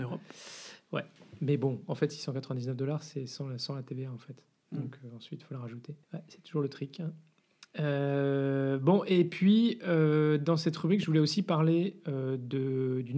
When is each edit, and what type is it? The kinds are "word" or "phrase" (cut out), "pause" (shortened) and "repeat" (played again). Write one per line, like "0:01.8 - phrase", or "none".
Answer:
0:06.0 - pause
0:07.7 - pause